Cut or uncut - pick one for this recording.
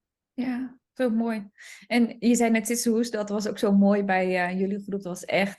uncut